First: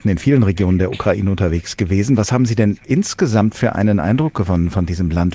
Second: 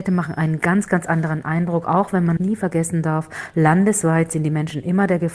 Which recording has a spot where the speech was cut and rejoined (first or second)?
second